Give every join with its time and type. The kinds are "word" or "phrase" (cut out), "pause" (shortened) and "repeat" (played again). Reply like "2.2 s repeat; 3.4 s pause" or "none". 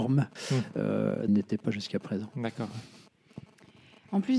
1.3 s phrase